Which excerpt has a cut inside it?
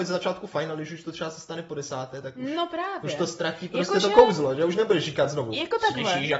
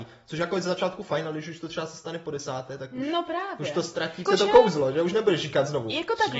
second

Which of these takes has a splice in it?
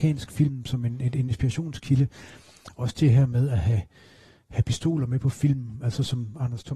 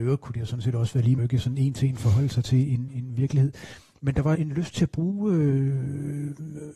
second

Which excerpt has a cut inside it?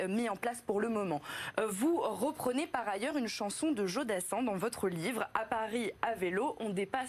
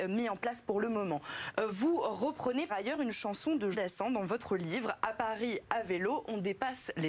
second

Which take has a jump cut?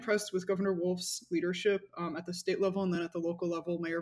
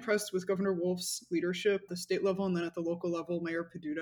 second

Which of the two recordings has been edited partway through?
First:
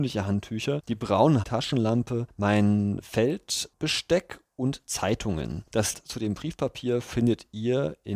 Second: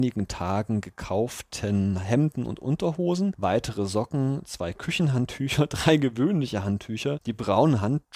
first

